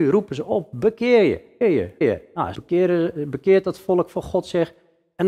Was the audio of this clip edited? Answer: yes; 3 cuts; at 1.6 s, 2.0 s, 2.5 s

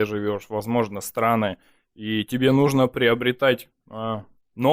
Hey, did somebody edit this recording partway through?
no; 0 cuts

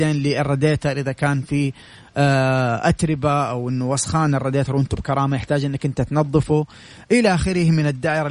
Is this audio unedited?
yes; 0 cuts

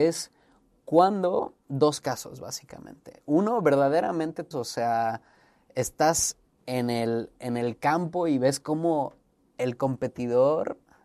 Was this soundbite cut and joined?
yes; 1 cut; at 4.5 s

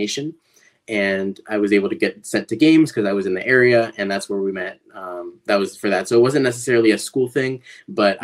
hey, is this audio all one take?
yes; 0 cuts

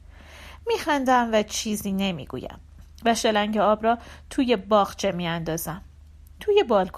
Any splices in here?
no; 0 cuts

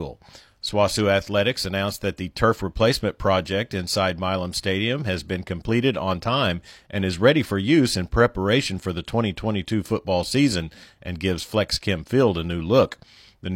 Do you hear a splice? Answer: no; 0 cuts

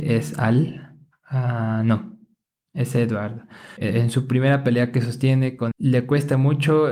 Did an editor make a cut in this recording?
yes; 1 cut; at 5.7 s

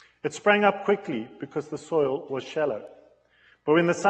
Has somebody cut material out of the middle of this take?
no; 0 cuts

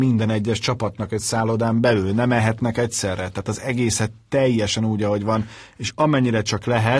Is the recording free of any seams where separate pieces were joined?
yes; 0 cuts

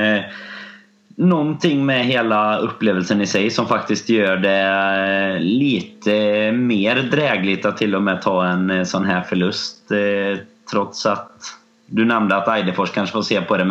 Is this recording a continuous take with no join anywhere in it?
yes; 0 cuts

